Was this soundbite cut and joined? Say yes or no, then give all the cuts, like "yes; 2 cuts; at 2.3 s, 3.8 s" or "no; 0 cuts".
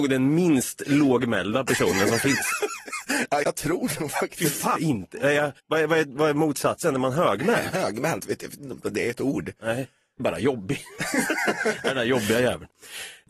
yes; 5 cuts; at 3.4 s, 4.8 s, 5.6 s, 8.2 s, 10.2 s